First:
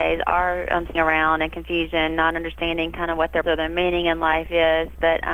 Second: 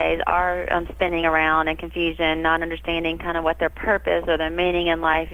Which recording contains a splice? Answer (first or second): first